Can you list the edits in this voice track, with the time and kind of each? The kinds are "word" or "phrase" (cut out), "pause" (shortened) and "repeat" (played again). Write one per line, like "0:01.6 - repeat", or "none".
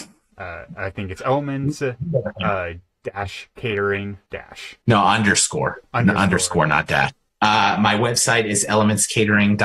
0:04.3 - pause